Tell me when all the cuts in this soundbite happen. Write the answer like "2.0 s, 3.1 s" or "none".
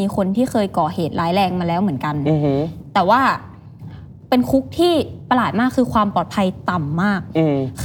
4.2 s